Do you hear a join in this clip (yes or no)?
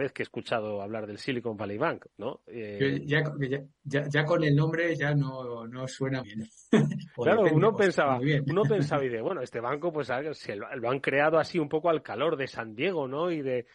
yes